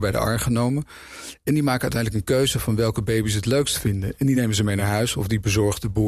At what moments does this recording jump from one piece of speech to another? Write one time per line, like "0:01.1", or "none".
none